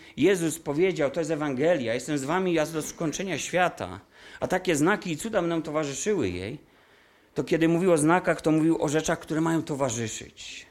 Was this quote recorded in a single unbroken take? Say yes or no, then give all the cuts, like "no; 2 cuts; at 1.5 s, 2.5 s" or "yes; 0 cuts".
yes; 0 cuts